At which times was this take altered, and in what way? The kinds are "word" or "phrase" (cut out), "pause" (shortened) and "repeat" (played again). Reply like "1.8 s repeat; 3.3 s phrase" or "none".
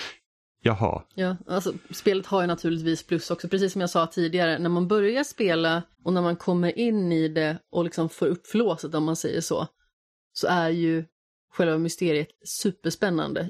5.9 s pause